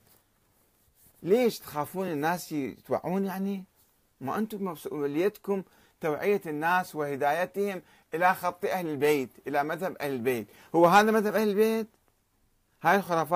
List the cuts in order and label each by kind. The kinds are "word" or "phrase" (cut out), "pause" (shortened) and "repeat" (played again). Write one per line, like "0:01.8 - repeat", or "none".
none